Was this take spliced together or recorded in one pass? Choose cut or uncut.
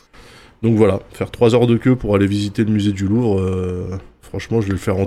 uncut